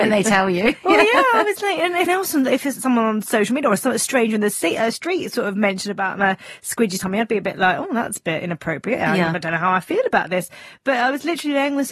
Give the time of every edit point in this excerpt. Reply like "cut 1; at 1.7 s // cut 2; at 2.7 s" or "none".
cut 1; at 2.1 s

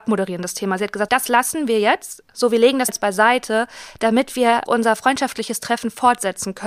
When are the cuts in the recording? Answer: cut 1; at 1.1 s // cut 2; at 2.9 s // cut 3; at 4.7 s

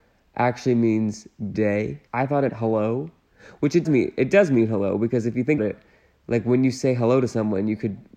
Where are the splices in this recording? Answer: cut 1; at 1.5 s // cut 2; at 2.1 s // cut 3; at 2.5 s // cut 4; at 3.8 s // cut 5; at 5.6 s

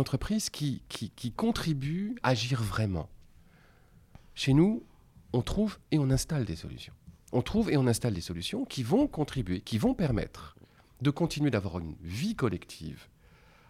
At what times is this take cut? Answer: cut 1; at 2.2 s

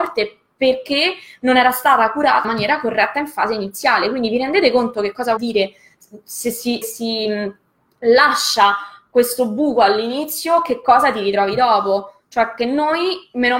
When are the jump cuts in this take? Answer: cut 1; at 2.4 s // cut 2; at 5.4 s // cut 3; at 6.8 s

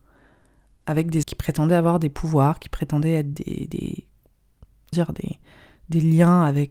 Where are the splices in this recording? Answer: cut 1; at 1.2 s // cut 2; at 3.3 s // cut 3; at 4.9 s

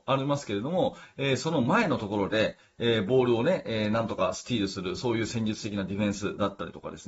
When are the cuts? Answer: none

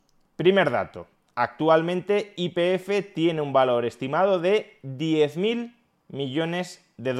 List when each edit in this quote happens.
none

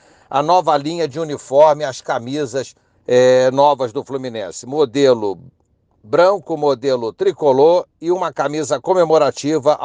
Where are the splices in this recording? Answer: none

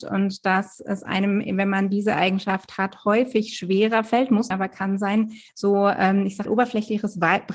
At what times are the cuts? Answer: cut 1; at 4.5 s // cut 2; at 5.5 s // cut 3; at 6.5 s

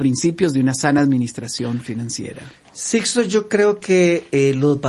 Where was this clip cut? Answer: none

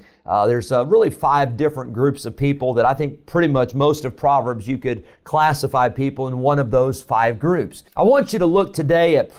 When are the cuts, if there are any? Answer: cut 1; at 7.9 s

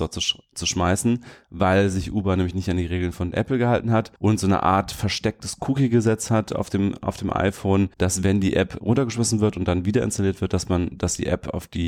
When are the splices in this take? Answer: cut 1; at 4.2 s // cut 2; at 7.9 s // cut 3; at 8.8 s

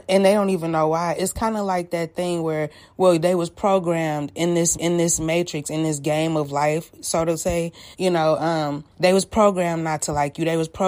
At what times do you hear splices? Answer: cut 1; at 1.1 s // cut 2; at 4.7 s // cut 3; at 7.9 s // cut 4; at 8.9 s

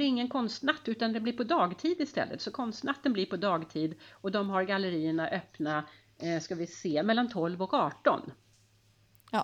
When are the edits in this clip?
none

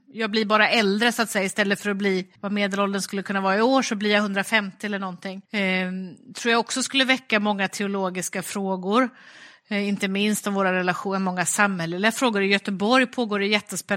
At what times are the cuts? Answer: cut 1; at 2.4 s // cut 2; at 5.5 s

